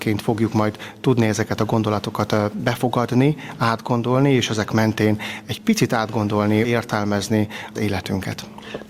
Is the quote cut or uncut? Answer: cut